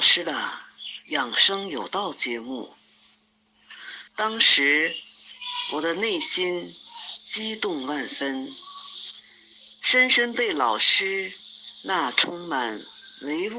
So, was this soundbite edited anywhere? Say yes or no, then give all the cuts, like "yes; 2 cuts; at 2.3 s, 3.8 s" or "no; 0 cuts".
yes; 1 cut; at 4.1 s